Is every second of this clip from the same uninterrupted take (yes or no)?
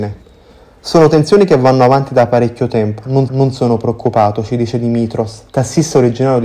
no